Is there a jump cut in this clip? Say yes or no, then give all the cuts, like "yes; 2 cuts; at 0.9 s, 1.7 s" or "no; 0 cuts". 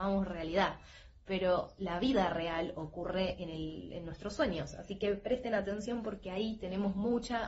no; 0 cuts